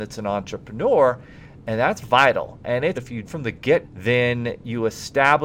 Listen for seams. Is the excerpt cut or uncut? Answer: cut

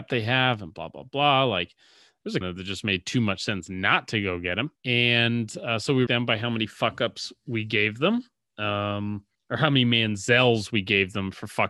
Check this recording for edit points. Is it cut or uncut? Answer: cut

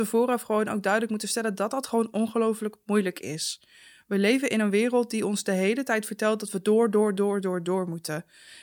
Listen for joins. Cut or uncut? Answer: uncut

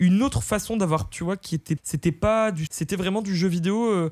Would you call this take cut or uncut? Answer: cut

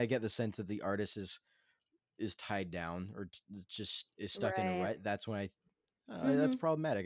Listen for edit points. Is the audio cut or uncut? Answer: uncut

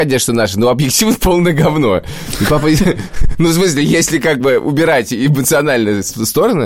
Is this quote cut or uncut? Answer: uncut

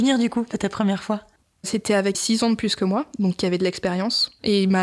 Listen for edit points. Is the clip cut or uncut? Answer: cut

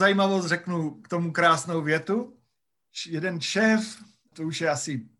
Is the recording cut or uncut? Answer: uncut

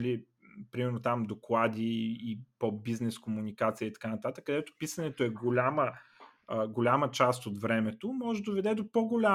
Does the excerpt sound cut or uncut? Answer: uncut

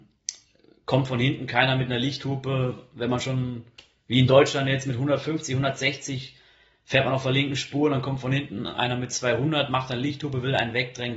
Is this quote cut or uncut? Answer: uncut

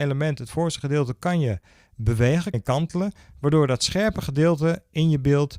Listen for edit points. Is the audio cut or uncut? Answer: cut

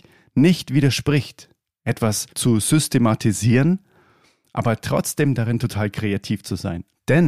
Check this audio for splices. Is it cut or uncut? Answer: uncut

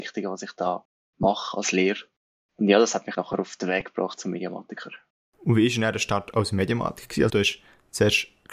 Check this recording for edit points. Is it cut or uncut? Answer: cut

